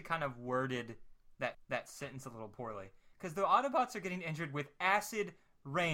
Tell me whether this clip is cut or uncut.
cut